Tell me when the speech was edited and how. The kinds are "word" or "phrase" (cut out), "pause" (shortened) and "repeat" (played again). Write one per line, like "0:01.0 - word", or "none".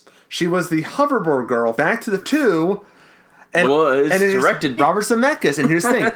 0:01.7 - word
0:02.2 - word
0:03.6 - word
0:04.8 - word